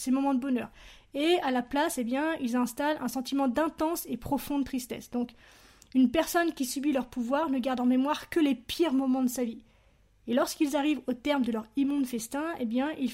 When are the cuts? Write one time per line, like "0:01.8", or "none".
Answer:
none